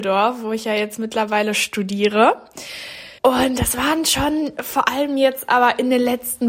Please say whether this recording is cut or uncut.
cut